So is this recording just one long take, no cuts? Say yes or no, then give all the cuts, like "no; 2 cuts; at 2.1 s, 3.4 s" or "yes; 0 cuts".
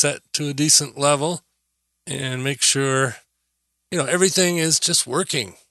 yes; 0 cuts